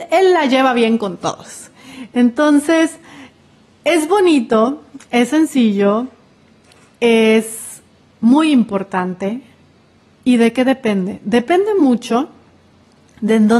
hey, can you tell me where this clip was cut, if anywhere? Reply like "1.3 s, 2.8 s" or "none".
none